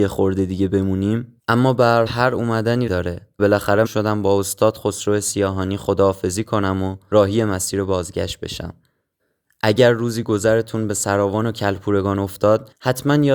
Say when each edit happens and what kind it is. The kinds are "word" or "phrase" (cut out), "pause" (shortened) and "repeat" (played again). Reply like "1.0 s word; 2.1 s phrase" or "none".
1.4 s pause; 2.1 s word; 2.9 s word; 3.4 s word; 3.9 s phrase; 9.1 s pause